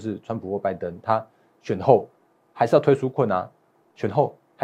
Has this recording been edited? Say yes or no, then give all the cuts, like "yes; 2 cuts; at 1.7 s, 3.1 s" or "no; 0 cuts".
no; 0 cuts